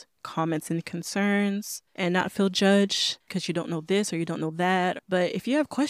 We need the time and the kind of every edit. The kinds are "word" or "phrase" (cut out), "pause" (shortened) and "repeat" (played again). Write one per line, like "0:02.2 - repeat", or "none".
0:01.9 - pause
0:03.2 - pause

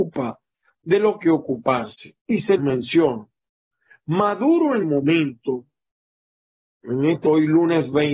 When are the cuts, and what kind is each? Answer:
0:01.2 - phrase
0:02.2 - pause
0:02.6 - word
0:04.8 - word
0:07.2 - word

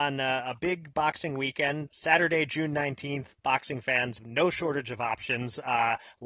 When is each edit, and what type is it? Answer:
0:01.9 - word
0:04.2 - word

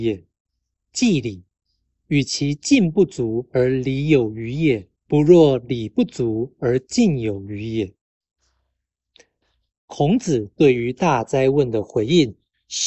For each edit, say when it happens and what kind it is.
0:05.0 - pause

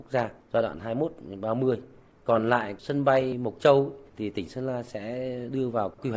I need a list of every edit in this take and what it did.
none

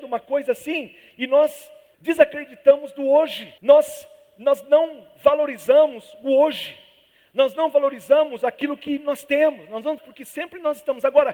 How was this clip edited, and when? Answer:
0:03.6 - pause
0:10.0 - word

